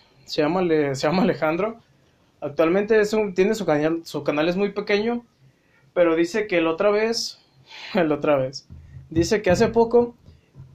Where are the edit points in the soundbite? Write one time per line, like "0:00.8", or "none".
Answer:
none